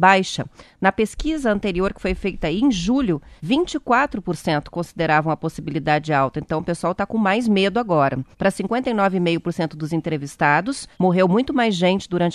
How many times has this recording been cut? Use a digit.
3